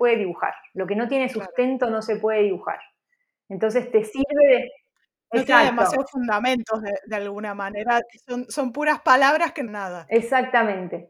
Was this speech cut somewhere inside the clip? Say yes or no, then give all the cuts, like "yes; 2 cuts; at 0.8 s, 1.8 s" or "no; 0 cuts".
yes; 1 cut; at 9.7 s